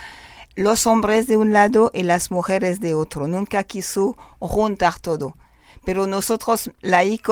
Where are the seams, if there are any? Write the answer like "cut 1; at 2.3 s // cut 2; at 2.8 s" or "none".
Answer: none